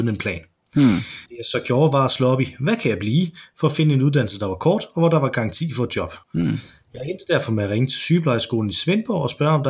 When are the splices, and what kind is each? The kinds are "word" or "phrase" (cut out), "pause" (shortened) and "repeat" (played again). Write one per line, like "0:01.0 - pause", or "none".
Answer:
0:01.3 - pause
0:06.2 - pause